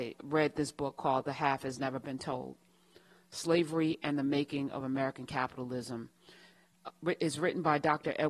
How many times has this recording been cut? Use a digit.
0